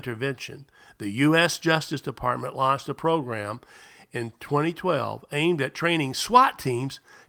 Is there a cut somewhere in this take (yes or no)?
no